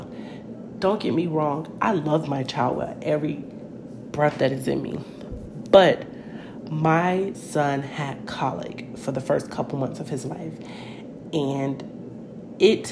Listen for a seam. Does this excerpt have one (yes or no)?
no